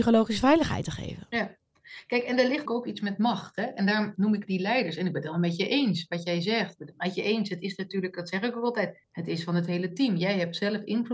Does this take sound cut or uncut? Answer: cut